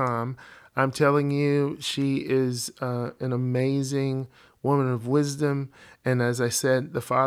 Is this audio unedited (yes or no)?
yes